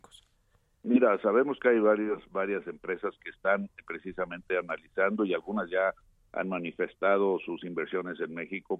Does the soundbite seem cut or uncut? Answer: uncut